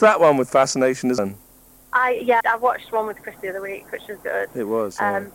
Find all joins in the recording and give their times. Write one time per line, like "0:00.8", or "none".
0:01.2
0:02.4
0:03.4
0:04.2